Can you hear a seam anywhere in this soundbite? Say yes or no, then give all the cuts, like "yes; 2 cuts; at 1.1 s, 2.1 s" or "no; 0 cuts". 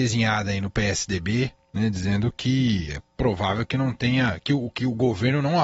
no; 0 cuts